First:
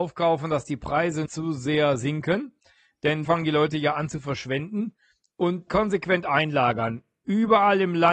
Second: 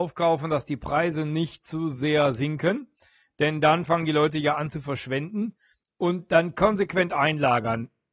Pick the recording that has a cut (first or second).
first